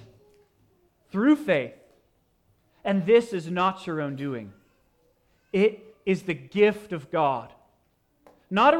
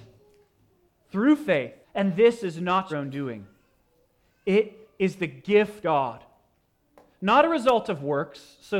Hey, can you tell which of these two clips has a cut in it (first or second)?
second